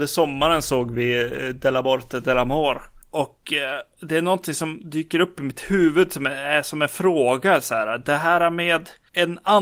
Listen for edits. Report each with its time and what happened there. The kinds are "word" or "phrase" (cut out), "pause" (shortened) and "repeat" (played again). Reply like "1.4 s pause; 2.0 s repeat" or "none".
none

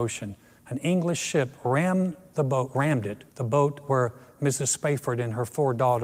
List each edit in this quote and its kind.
3.3 s pause

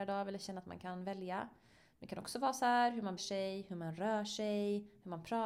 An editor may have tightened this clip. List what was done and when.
3.2 s word

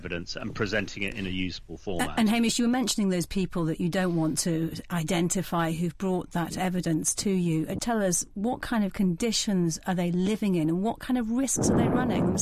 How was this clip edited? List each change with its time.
7.8 s word

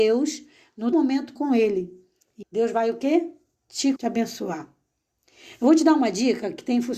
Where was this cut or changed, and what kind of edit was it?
0.9 s word; 1.4 s word; 2.4 s word; 4.0 s word

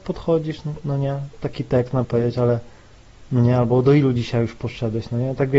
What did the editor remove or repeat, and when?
2.0 s phrase

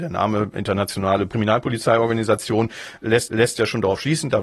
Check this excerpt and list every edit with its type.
3.3 s repeat

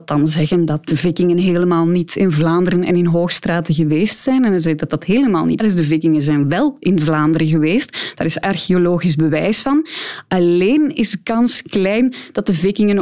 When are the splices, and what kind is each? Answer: 5.6 s word

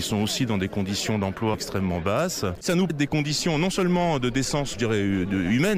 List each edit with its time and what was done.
1.5 s word; 2.9 s word; 4.7 s word

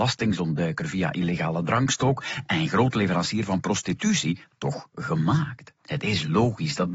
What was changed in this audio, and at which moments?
5.8 s pause

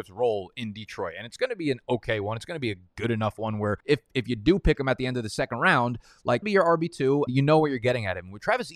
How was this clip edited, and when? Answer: 3.8 s pause; 6.4 s phrase; 7.3 s word

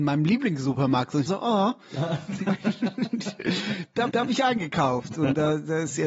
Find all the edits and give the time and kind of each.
1.3 s word; 4.1 s repeat

